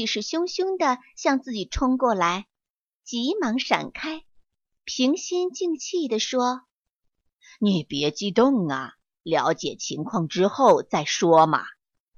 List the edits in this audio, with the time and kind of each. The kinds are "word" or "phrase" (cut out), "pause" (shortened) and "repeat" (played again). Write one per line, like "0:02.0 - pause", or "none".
none